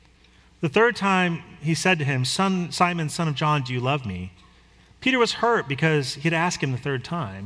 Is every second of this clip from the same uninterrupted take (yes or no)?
yes